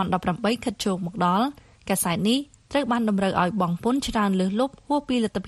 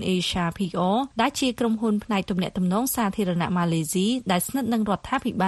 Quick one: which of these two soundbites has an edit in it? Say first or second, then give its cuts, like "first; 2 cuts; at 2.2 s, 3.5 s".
second; 1 cut; at 1.1 s